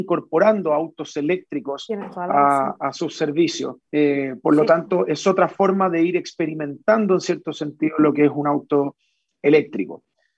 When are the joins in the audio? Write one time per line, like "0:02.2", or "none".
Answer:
0:03.8